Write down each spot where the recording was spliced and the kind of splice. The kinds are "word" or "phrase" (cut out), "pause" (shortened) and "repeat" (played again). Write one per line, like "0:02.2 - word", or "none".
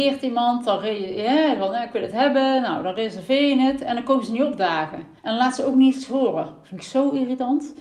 0:05.2 - pause